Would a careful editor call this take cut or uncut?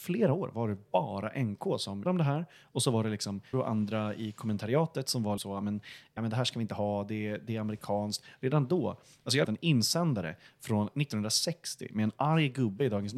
cut